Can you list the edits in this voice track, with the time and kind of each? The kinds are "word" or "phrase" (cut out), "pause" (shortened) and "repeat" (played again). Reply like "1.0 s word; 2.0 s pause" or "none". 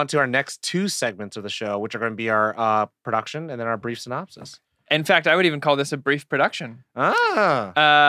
none